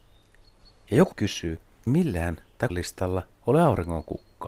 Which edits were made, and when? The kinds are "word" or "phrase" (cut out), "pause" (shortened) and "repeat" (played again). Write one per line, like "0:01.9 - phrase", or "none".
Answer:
0:01.1 - word
0:01.9 - word
0:02.7 - word